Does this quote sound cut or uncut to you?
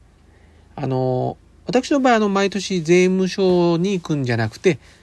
uncut